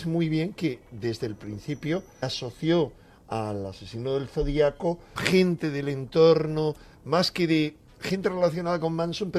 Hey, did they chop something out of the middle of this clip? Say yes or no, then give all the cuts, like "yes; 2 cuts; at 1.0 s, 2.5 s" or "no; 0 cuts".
yes; 2 cuts; at 2.2 s, 5.2 s